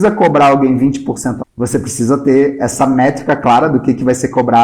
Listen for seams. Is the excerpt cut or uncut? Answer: cut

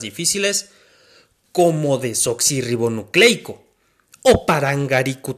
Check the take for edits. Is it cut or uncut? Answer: uncut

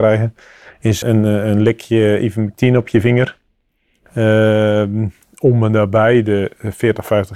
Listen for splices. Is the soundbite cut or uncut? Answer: cut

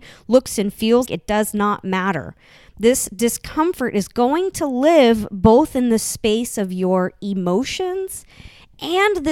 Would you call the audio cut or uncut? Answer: cut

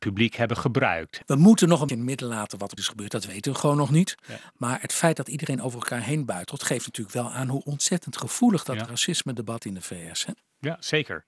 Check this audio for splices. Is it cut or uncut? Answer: cut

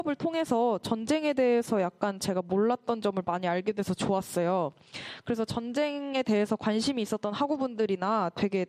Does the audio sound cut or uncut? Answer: uncut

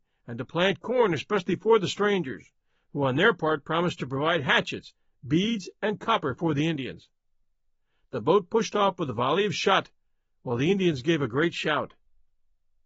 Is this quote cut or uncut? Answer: uncut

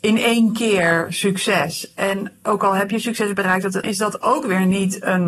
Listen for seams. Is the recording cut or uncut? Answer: cut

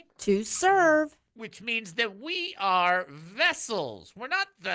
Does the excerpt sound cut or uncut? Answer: uncut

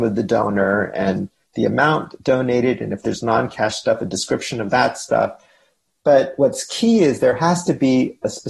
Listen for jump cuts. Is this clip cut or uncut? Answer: uncut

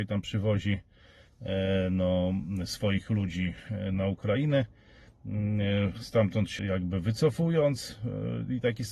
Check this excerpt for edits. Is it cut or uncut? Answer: cut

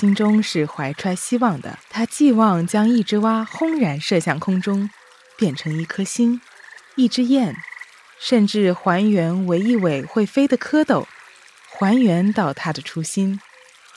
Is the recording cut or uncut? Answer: cut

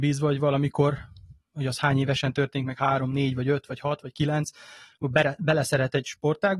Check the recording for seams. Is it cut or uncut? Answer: uncut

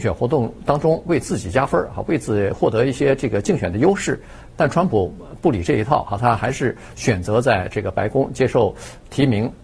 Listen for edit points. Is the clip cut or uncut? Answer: cut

